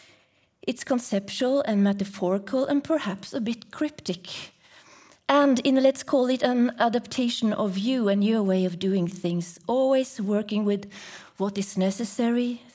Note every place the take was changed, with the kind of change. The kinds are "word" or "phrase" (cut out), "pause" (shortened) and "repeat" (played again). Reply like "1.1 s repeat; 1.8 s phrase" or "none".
none